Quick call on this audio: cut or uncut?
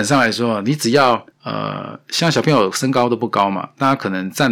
cut